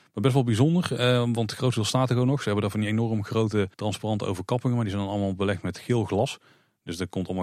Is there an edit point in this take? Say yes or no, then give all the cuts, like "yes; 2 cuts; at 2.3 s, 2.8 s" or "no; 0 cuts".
yes; 1 cut; at 3.7 s